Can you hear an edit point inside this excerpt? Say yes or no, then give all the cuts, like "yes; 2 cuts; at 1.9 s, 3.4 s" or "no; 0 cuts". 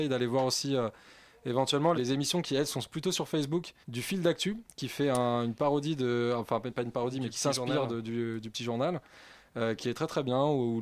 yes; 3 cuts; at 1.9 s, 3.8 s, 9.8 s